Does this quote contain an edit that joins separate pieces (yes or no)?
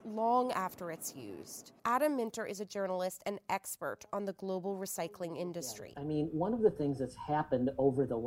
yes